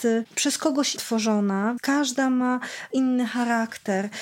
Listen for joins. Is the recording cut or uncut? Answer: cut